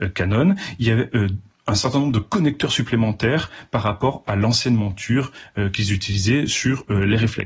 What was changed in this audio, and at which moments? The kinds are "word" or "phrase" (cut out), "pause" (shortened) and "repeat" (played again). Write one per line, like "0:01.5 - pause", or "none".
none